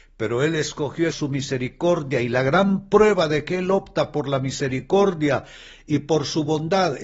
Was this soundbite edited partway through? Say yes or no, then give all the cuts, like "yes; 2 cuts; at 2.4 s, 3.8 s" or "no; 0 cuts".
yes; 1 cut; at 1.1 s